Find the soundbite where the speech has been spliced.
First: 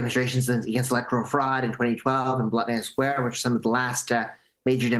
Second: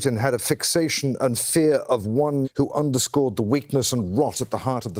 second; 1 cut; at 2.4 s

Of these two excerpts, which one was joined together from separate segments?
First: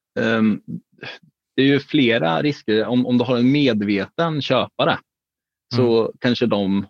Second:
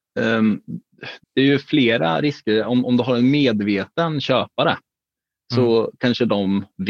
second; 1 cut; at 1.2 s

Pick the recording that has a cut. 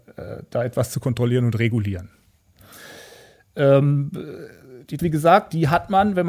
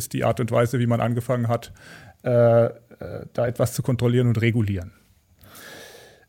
first; 1 cut; at 5.0 s

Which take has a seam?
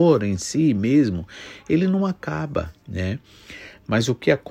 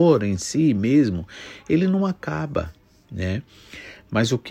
first; 1 cut; at 2.8 s

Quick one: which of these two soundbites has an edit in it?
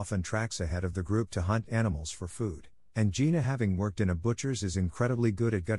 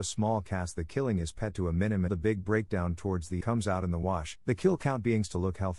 second; 3 cuts; at 2.1 s, 3.4 s, 4.4 s

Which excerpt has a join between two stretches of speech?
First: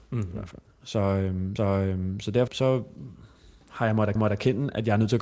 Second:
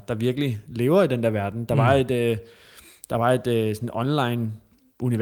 first; 3 cuts; at 1.6 s, 2.5 s, 4.2 s

